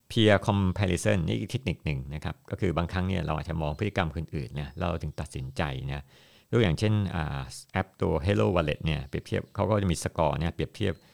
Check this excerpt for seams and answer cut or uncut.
uncut